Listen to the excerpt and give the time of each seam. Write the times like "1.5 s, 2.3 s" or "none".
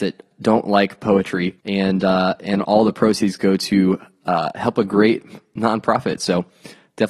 1.6 s